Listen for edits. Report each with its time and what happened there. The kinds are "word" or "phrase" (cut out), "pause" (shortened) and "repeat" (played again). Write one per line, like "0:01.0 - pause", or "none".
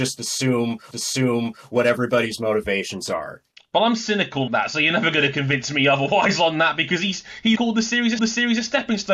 0:00.9 - repeat
0:03.6 - pause
0:04.5 - word
0:07.6 - word
0:08.2 - repeat